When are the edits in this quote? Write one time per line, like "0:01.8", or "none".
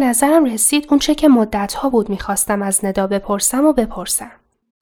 none

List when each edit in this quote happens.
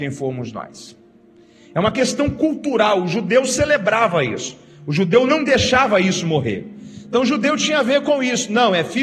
none

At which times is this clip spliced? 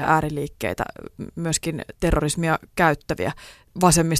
0:01.9

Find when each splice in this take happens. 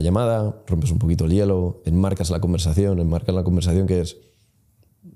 none

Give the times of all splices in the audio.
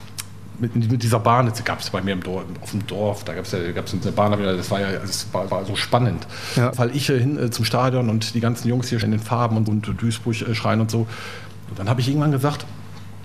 0:04.0
0:05.5
0:06.7
0:09.0
0:09.7

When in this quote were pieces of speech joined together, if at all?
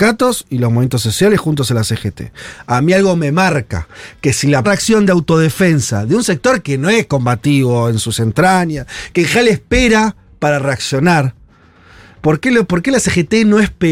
0:04.6

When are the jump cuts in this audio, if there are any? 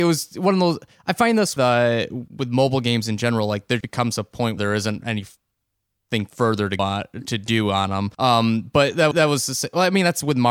0:01.6
0:02.3
0:03.8
0:04.6
0:06.8
0:08.1
0:09.1

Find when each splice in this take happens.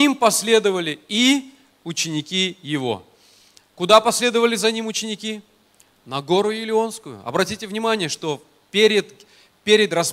none

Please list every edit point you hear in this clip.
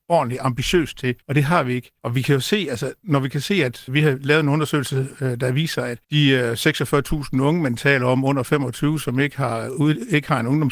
0:01.2
0:02.0
0:03.9
0:06.0

